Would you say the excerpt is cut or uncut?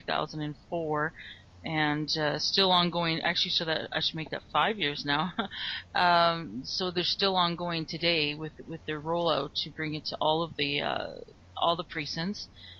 uncut